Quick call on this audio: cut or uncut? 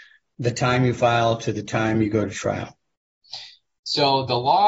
uncut